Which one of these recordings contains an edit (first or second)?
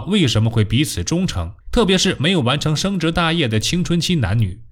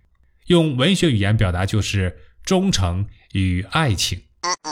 first